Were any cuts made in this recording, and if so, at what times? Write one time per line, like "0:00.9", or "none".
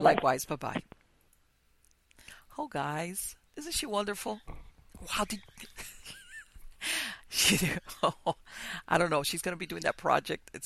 0:03.5
0:04.4